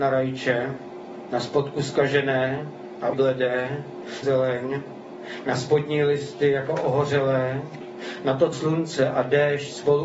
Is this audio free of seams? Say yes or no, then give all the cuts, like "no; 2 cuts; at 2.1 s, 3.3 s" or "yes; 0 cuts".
no; 3 cuts; at 3.1 s, 4.2 s, 8.5 s